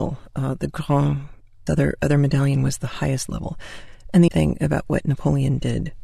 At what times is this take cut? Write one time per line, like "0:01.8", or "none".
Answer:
0:01.7
0:04.3